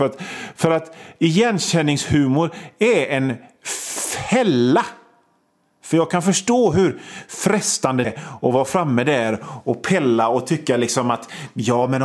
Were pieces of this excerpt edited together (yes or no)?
yes